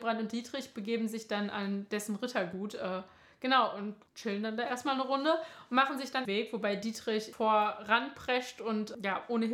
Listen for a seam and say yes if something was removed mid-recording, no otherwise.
yes